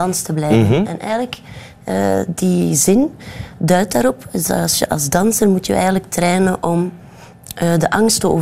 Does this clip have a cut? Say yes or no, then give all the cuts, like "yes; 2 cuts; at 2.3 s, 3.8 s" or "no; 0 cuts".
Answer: no; 0 cuts